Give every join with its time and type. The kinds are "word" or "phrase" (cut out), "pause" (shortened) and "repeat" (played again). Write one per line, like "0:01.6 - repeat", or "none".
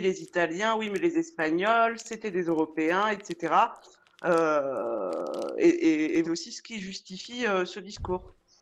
0:06.2 - phrase